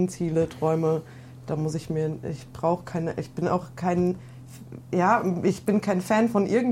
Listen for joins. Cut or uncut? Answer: uncut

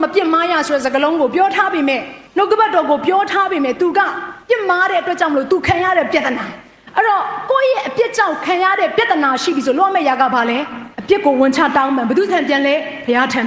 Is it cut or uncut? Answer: cut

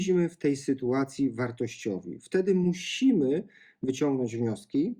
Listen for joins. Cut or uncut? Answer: uncut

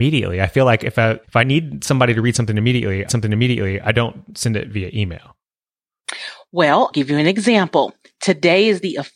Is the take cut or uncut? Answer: cut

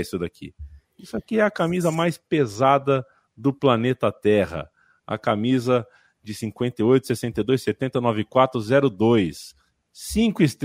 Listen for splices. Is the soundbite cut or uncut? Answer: uncut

